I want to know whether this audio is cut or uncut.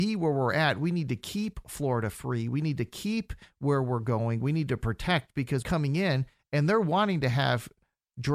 cut